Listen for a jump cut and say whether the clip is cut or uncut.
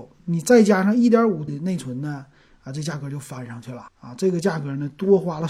cut